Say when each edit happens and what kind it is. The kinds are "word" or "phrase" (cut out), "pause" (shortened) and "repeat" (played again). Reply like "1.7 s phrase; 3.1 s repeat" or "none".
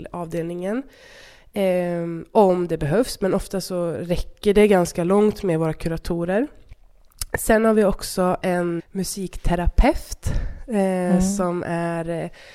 8.8 s word